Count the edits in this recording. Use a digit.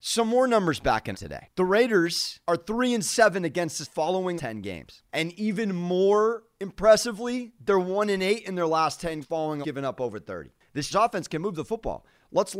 8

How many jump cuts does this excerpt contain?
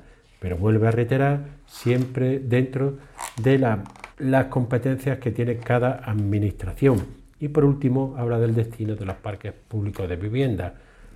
1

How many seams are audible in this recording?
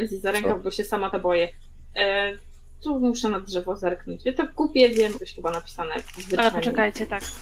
3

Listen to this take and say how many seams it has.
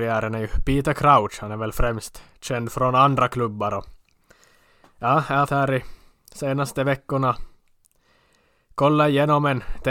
1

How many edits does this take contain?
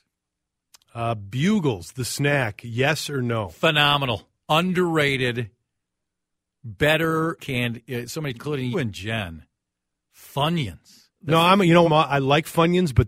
5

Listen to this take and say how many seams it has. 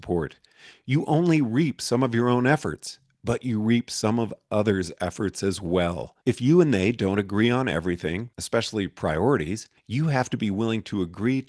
3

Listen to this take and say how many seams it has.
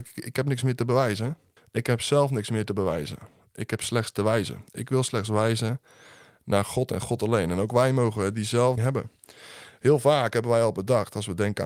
2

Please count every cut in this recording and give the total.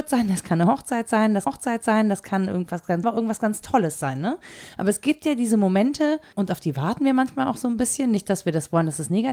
3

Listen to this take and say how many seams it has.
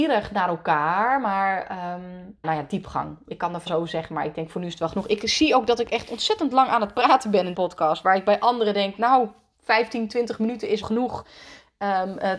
4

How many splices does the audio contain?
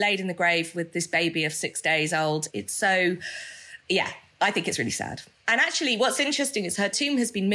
1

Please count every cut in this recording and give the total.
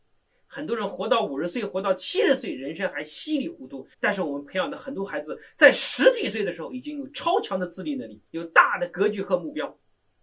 2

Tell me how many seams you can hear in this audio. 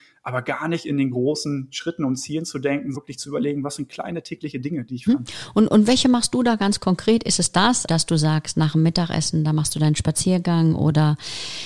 3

